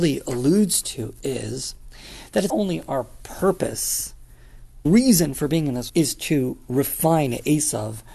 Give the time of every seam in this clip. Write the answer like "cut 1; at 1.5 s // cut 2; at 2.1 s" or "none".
cut 1; at 2.5 s // cut 2; at 4.9 s // cut 3; at 5.9 s